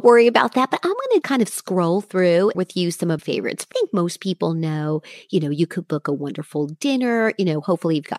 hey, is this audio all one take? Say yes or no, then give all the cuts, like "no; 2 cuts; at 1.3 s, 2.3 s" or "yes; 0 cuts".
no; 4 cuts; at 1.2 s, 2.5 s, 3.2 s, 3.7 s